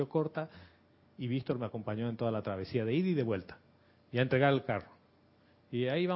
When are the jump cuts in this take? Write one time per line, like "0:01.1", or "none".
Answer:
none

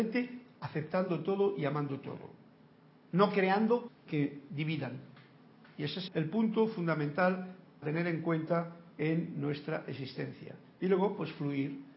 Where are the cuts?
0:03.9
0:06.1
0:07.8

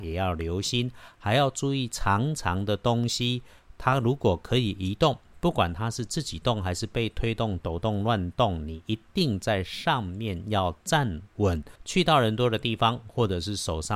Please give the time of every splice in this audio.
0:07.6
0:11.8

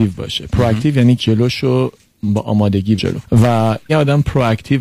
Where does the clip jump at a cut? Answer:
0:01.2
0:03.0
0:03.9

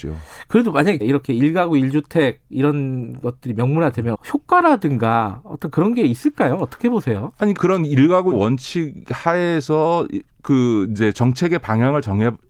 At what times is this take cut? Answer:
0:01.0
0:04.1
0:07.6
0:08.3

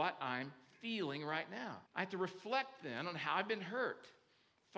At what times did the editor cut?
0:01.9

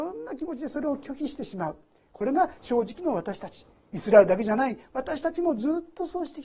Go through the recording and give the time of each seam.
none

